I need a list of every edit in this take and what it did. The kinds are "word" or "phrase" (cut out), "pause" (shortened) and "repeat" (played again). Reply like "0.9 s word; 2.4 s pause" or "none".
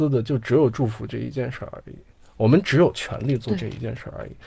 none